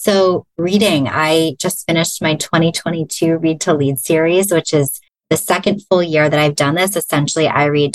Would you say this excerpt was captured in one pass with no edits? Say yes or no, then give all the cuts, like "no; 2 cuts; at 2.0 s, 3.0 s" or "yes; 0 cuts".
no; 1 cut; at 5.1 s